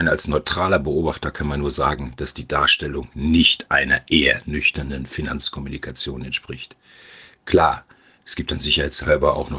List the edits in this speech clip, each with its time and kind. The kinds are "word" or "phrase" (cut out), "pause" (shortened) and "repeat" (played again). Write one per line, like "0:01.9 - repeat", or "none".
none